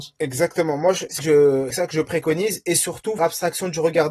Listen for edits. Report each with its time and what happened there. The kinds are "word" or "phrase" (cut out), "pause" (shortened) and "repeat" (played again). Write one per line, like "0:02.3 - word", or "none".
0:01.2 - word
0:01.7 - word
0:03.2 - word